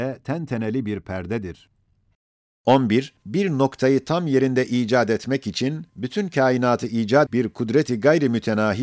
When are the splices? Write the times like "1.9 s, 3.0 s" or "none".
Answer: 3.2 s, 5.9 s, 7.3 s